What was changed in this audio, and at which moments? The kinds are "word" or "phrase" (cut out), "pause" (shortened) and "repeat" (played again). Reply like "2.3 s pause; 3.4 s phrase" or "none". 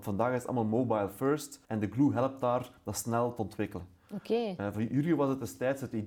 1.6 s pause